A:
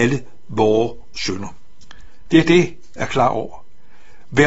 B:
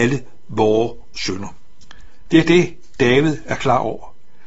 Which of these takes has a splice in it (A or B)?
A